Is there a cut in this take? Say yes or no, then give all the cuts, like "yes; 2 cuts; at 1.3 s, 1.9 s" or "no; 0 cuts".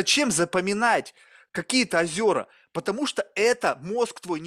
no; 0 cuts